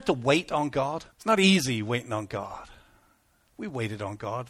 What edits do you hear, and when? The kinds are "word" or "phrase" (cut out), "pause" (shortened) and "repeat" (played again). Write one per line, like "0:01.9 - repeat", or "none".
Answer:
0:01.1 - pause